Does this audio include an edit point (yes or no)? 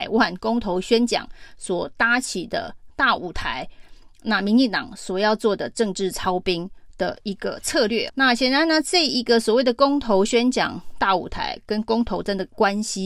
yes